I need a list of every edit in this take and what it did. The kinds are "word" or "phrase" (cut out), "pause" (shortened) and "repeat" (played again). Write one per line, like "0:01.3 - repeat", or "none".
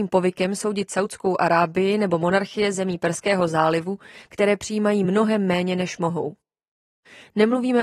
none